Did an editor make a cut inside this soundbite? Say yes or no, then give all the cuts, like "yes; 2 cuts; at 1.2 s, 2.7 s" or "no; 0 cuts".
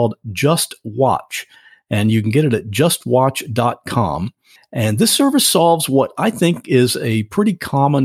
no; 0 cuts